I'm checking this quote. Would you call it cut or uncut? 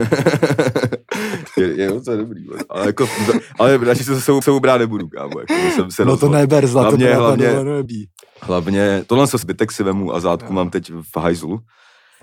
cut